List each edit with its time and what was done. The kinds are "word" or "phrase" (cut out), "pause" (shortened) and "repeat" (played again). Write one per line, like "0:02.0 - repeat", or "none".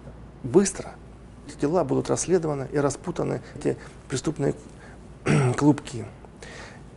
0:01.5 - word
0:03.6 - word